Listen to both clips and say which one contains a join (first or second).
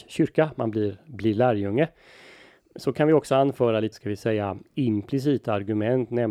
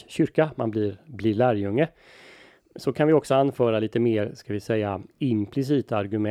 first